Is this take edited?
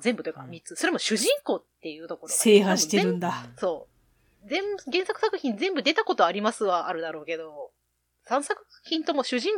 no; 0 cuts

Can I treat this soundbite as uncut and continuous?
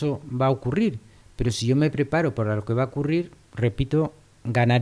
yes; 0 cuts

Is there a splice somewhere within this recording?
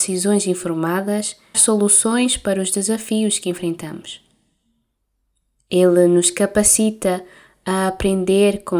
yes; 1 cut; at 1.5 s

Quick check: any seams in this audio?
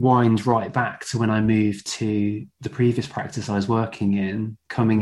no; 0 cuts

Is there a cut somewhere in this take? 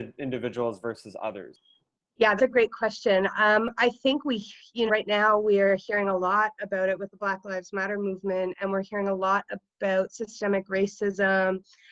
yes; 2 cuts; at 2.4 s, 4.9 s

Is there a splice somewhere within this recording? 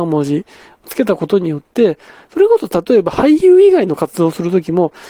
no; 0 cuts

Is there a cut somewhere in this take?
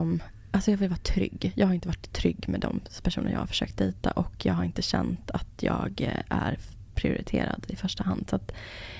no; 0 cuts

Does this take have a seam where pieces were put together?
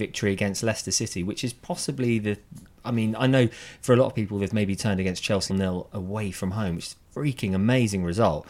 yes; 3 cuts; at 4.5 s, 5.5 s, 7.0 s

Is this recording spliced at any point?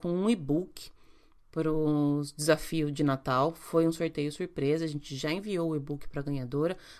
no; 0 cuts

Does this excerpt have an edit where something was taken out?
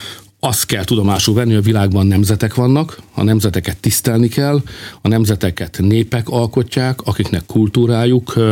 no; 0 cuts

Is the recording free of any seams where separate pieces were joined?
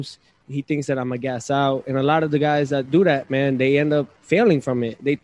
no; 1 cut; at 4.2 s

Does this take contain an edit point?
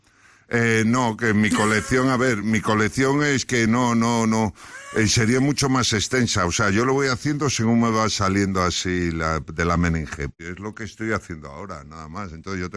no; 0 cuts

